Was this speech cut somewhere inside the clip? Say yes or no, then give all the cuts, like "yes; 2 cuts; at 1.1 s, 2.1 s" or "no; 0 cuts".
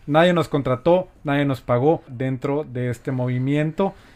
yes; 1 cut; at 2.1 s